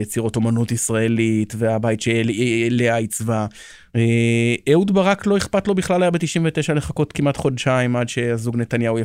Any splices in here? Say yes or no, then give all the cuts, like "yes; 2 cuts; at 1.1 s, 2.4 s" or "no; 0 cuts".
no; 0 cuts